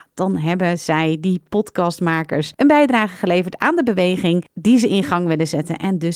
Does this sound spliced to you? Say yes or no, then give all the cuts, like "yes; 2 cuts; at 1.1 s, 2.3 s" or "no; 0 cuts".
no; 0 cuts